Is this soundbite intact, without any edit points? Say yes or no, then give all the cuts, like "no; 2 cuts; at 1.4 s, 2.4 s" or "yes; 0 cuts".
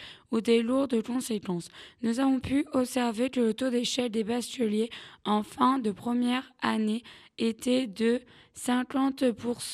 yes; 0 cuts